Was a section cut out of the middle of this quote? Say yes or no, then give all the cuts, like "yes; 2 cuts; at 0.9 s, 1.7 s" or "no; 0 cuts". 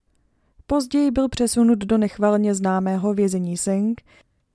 yes; 1 cut; at 3.6 s